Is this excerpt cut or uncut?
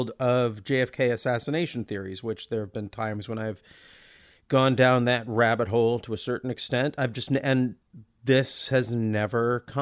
uncut